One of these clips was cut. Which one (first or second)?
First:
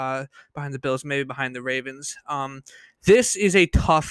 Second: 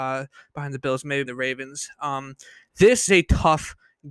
second